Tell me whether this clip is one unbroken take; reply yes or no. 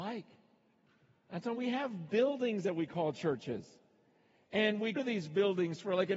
no